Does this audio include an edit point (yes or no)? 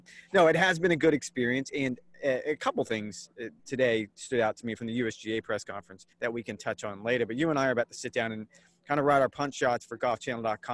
yes